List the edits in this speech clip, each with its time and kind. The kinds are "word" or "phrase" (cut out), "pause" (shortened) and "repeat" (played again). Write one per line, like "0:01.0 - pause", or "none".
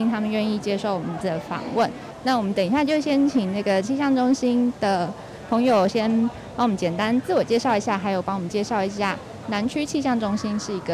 0:01.2 - word